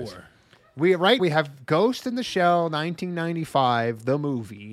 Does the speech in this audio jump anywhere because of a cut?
yes; 1 cut; at 1.2 s

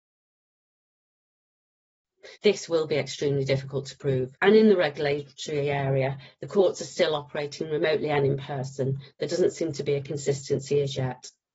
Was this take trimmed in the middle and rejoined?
yes; 2 cuts; at 2.4 s, 4.3 s

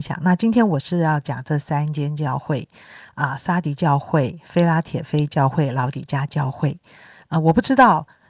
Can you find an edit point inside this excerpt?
no; 0 cuts

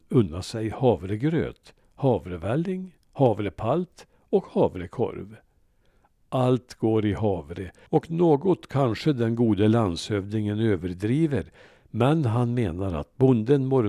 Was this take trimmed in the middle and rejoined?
yes; 1 cut; at 3.0 s

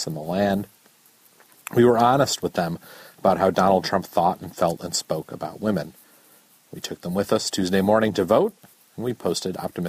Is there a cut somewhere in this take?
no; 0 cuts

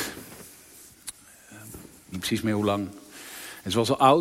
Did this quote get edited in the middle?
yes; 1 cut; at 2.1 s

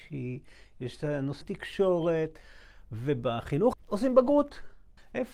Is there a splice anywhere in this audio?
yes; 2 cuts; at 1.4 s, 3.7 s

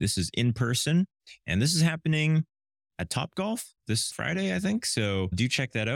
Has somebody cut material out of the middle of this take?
no; 0 cuts

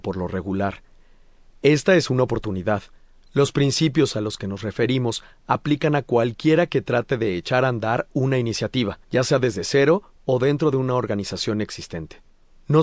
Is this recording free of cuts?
no; 1 cut; at 9.0 s

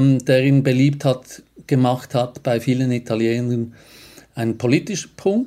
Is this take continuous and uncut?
yes; 0 cuts

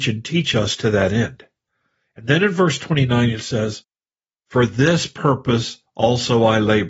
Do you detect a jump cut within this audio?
no; 0 cuts

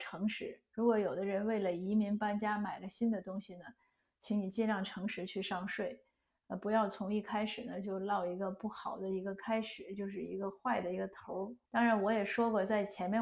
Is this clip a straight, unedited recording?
no; 1 cut; at 11.6 s

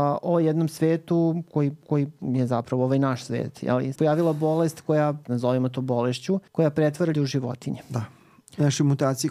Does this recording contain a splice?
yes; 5 cuts; at 1.8 s, 3.9 s, 5.2 s, 6.5 s, 7.1 s

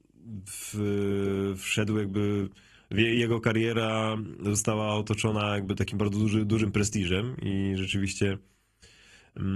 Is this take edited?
no; 0 cuts

